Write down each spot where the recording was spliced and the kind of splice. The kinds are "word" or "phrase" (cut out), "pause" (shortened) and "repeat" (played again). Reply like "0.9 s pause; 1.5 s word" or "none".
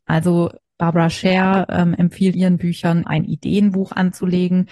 2.3 s word; 3.0 s word